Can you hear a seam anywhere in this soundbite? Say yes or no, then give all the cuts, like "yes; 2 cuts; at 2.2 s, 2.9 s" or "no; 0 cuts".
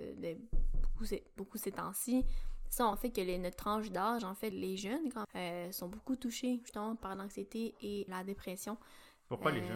yes; 4 cuts; at 2.9 s, 4.5 s, 5.2 s, 8.1 s